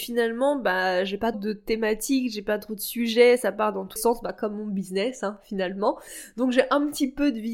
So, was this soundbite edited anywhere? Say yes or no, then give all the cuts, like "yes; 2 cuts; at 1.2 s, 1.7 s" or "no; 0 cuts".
yes; 2 cuts; at 1.3 s, 4.0 s